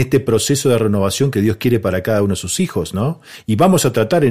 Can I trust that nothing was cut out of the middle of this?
yes; 0 cuts

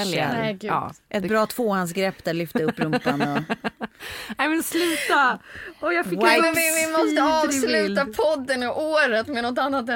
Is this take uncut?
yes; 0 cuts

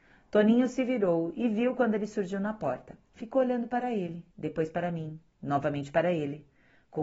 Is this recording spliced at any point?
yes; 3 cuts; at 3.1 s, 4.3 s, 5.3 s

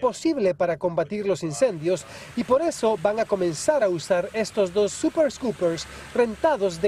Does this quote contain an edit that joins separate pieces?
no; 0 cuts

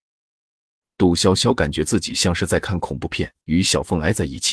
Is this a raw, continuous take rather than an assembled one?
no; 1 cut; at 3.4 s

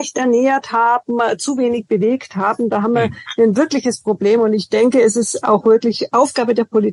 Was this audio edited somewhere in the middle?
no; 0 cuts

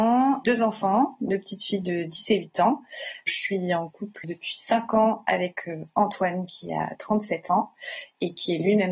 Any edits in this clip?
yes; 1 cut; at 4.2 s

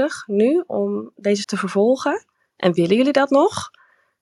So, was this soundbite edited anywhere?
yes; 1 cut; at 1.4 s

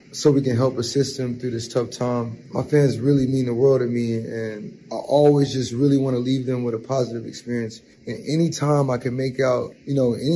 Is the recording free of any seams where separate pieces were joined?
yes; 0 cuts

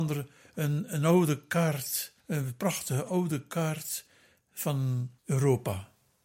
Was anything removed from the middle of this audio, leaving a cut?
yes; 2 cuts; at 2.2 s, 5.2 s

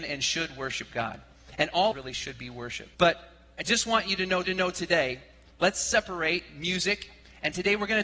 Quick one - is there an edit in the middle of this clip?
yes; 3 cuts; at 1.9 s, 2.9 s, 4.4 s

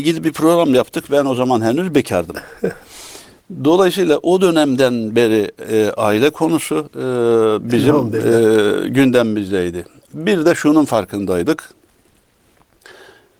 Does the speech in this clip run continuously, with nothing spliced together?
yes; 0 cuts

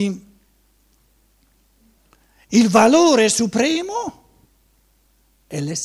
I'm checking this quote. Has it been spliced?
no; 0 cuts

